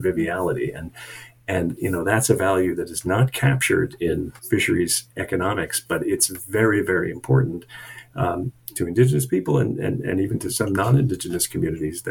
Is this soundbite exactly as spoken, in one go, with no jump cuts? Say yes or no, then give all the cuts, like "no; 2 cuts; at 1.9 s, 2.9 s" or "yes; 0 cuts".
no; 1 cut; at 4.4 s